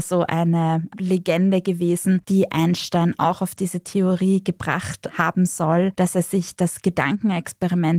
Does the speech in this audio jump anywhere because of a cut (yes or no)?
no